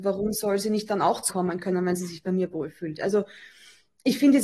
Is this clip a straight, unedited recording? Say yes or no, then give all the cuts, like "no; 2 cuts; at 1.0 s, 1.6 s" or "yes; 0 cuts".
no; 1 cut; at 1.3 s